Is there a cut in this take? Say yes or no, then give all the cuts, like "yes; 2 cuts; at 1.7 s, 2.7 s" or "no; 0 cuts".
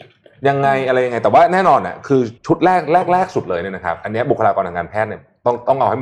yes; 1 cut; at 2.4 s